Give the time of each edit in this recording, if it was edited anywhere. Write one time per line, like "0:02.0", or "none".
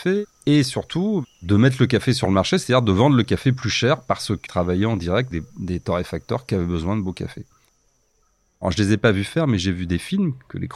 0:04.5
0:05.3

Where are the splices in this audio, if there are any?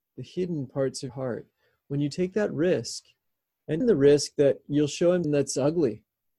0:01.1
0:03.8
0:05.2

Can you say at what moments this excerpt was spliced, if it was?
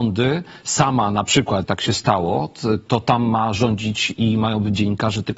0:01.6
0:02.9

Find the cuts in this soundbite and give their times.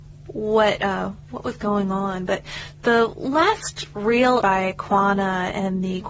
0:04.4

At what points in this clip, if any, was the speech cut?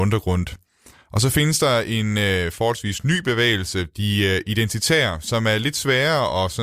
none

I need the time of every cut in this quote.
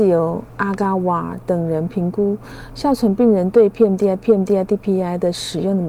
0:04.2

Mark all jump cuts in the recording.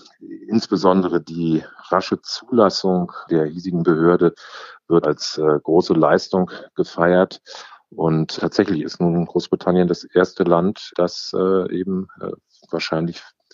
0:03.3
0:05.0
0:08.4
0:10.9

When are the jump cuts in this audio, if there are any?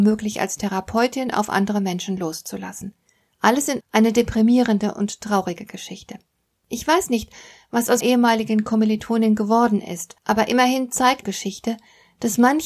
0:03.8
0:08.0
0:10.2
0:11.2

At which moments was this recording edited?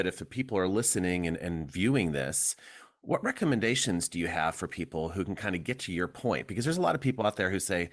none

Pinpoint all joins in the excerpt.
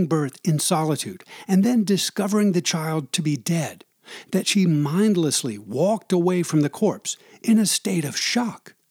none

